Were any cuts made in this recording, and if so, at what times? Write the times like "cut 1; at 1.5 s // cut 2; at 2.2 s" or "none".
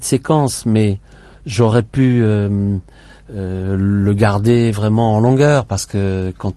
none